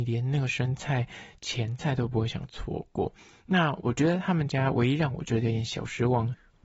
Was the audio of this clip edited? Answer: no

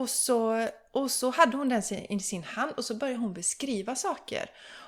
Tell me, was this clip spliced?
no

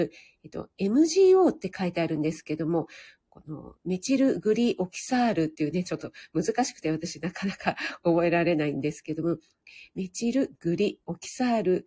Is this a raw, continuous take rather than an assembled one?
yes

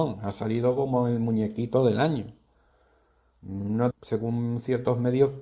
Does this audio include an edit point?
yes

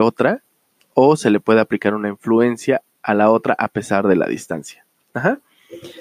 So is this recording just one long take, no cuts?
yes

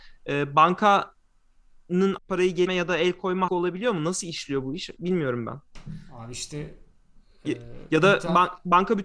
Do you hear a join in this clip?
yes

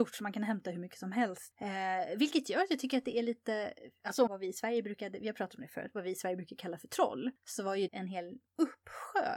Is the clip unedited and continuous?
no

